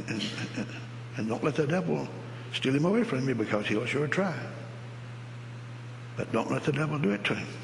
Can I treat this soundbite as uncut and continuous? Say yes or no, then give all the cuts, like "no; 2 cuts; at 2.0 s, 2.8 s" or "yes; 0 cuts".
yes; 0 cuts